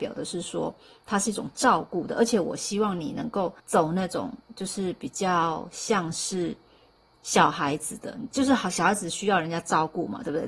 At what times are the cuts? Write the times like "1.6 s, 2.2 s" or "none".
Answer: 3.6 s